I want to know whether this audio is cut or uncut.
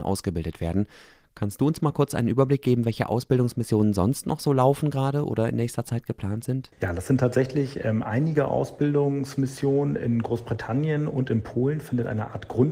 uncut